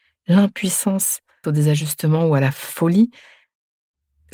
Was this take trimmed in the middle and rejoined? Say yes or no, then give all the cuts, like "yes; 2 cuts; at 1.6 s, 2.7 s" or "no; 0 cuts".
yes; 1 cut; at 1.4 s